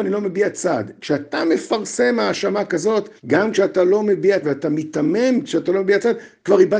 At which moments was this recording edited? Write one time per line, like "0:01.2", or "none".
0:03.2
0:04.4